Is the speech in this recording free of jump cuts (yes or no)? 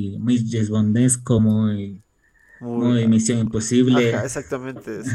yes